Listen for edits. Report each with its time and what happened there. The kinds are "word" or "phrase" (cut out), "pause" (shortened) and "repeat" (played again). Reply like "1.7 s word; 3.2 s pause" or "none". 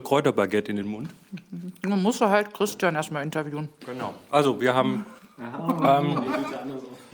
5.2 s pause